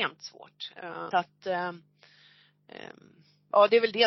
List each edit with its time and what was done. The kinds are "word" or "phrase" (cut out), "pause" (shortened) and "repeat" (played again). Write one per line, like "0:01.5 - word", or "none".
0:01.1 - word